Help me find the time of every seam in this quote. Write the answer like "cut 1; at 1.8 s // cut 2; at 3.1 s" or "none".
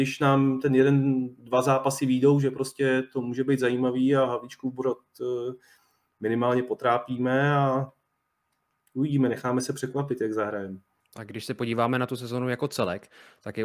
cut 1; at 11.0 s